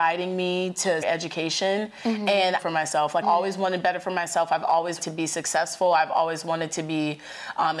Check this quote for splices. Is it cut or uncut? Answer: cut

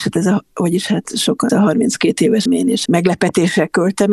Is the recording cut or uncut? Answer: cut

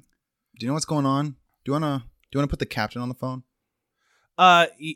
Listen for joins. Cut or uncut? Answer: uncut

